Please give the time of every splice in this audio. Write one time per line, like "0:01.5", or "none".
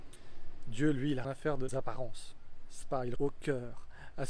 0:01.2
0:01.7
0:02.8
0:03.2